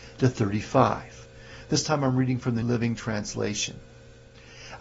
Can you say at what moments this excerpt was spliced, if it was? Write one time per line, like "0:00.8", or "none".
0:02.6